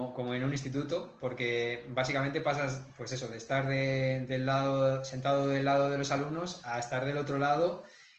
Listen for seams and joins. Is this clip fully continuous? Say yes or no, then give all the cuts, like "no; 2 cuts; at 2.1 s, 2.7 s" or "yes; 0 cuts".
yes; 0 cuts